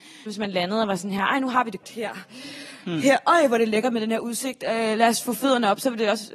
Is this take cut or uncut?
cut